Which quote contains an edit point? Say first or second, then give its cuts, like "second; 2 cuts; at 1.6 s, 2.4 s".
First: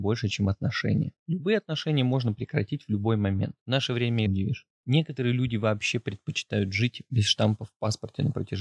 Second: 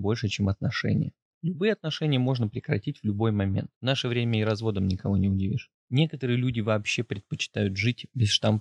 first; 2 cuts; at 1.2 s, 4.3 s